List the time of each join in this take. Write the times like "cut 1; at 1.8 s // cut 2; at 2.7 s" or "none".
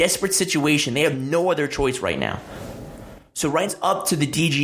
cut 1; at 3.7 s